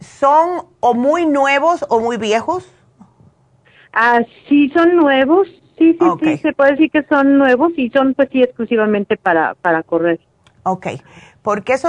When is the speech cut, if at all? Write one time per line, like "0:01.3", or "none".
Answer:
none